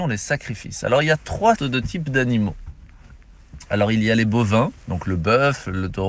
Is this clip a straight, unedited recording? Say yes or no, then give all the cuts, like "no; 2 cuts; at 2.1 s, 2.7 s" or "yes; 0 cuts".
no; 2 cuts; at 1.6 s, 4.8 s